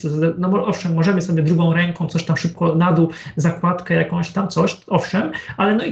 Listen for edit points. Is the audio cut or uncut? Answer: uncut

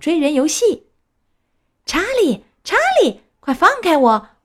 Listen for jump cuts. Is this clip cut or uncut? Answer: uncut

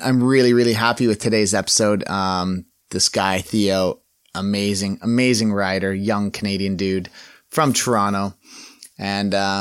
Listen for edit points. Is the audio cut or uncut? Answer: uncut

